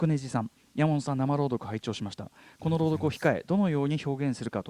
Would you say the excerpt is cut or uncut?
uncut